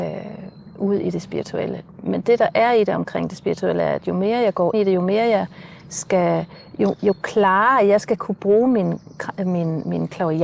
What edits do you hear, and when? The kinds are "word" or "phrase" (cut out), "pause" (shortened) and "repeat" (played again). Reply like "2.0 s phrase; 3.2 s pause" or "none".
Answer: 4.7 s word